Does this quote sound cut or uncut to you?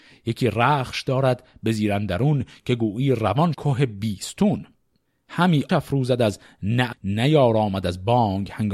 cut